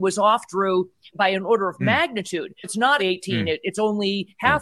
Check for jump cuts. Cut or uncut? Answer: cut